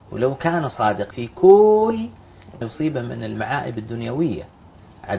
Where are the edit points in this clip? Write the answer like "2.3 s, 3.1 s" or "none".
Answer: 1.1 s, 2.6 s